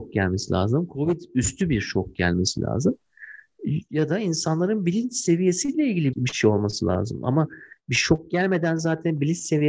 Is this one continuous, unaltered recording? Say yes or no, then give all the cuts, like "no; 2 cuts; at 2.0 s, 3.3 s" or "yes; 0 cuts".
no; 1 cut; at 6.1 s